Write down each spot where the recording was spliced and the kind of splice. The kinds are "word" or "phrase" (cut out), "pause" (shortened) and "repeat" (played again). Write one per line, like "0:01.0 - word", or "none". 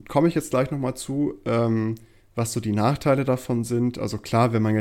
none